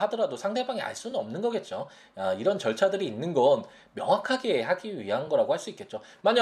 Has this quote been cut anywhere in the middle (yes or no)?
no